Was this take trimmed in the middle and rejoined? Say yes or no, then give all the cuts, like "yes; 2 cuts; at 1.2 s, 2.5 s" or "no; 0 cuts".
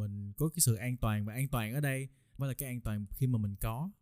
yes; 1 cut; at 2.4 s